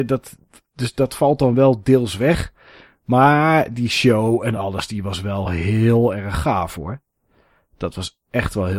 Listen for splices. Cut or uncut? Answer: uncut